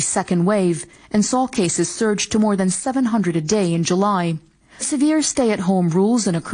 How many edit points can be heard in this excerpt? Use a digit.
0